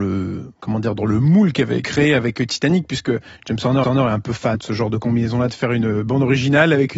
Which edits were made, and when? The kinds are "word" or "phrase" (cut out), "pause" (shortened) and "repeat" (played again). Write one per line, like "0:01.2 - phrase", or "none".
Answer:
0:01.8 - phrase
0:03.8 - repeat
0:04.5 - word